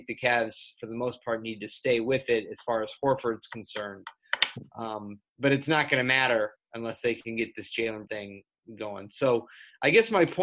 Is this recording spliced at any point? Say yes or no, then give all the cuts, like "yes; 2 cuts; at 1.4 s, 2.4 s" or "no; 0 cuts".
yes; 2 cuts; at 5.3 s, 8.1 s